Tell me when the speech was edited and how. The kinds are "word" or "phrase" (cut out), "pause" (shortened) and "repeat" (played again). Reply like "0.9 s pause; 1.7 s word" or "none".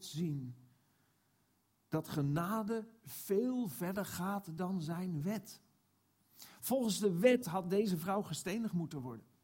none